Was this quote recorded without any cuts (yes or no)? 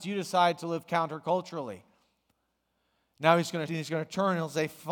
no